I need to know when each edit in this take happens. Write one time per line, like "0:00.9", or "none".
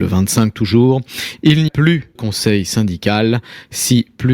0:01.7
0:02.1